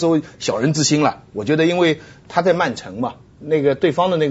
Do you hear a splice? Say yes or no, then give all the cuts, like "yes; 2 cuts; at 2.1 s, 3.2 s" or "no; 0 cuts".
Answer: no; 0 cuts